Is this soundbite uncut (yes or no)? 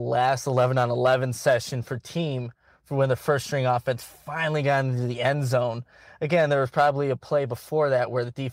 yes